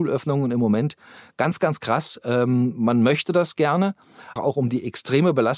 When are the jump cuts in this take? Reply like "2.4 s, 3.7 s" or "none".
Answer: 4.4 s